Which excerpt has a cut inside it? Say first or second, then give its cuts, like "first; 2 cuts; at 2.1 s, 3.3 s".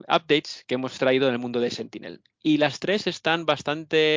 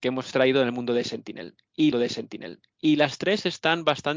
second; 1 cut; at 1.9 s